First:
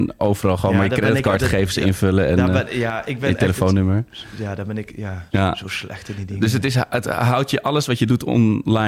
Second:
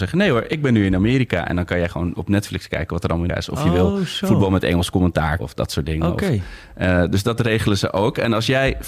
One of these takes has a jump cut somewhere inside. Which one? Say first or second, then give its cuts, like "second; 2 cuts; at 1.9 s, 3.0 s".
second; 2 cuts; at 3.3 s, 5.4 s